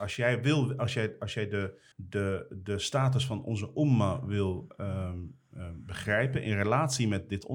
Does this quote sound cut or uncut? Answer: cut